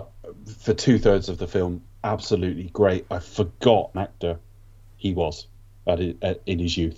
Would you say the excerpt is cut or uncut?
cut